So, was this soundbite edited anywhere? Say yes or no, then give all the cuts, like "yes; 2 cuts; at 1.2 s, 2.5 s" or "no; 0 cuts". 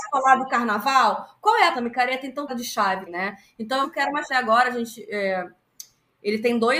yes; 5 cuts; at 1.7 s, 2.5 s, 3.1 s, 3.8 s, 4.3 s